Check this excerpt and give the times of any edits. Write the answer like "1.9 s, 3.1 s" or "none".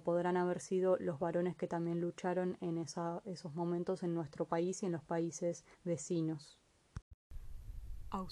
5.7 s